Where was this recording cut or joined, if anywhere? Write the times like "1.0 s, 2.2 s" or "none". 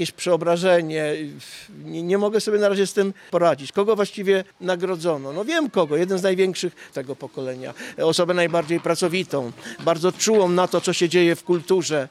4.5 s, 6.9 s